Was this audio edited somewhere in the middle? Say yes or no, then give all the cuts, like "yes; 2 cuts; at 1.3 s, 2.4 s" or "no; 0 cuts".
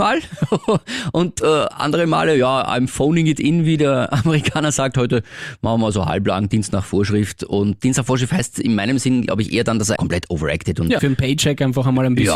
yes; 2 cuts; at 10.0 s, 11.0 s